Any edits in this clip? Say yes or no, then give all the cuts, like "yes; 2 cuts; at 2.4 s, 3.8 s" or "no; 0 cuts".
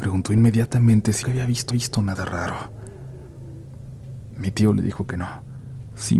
yes; 2 cuts; at 1.2 s, 1.7 s